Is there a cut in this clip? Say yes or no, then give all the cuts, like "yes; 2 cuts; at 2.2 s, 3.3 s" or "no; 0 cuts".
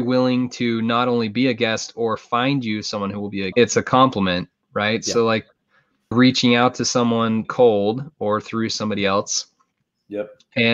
yes; 3 cuts; at 3.5 s, 6.1 s, 7.4 s